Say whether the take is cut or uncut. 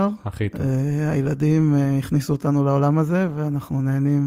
uncut